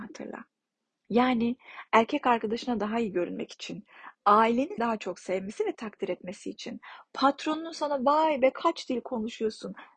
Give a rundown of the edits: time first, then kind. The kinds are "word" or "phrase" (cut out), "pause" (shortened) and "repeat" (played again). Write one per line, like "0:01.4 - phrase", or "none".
0:04.8 - word